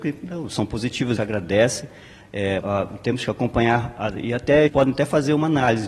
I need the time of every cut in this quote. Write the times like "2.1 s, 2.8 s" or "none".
1.2 s, 2.6 s, 4.7 s